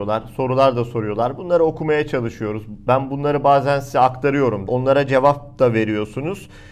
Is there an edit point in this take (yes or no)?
yes